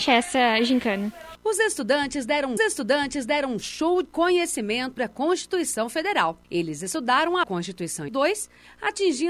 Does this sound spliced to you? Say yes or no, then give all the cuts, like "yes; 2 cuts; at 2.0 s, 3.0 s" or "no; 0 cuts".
yes; 6 cuts; at 2.6 s, 4.0 s, 5.0 s, 6.4 s, 7.4 s, 8.1 s